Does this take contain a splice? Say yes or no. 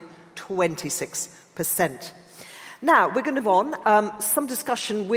yes